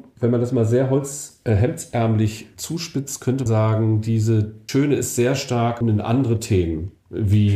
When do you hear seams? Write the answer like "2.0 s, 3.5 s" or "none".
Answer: 3.5 s, 4.7 s, 5.8 s